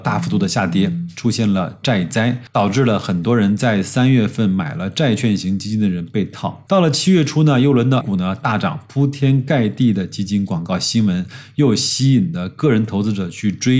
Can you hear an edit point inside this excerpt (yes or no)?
yes